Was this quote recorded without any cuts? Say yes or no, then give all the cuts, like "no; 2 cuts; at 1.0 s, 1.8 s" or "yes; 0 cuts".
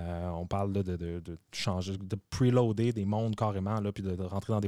yes; 0 cuts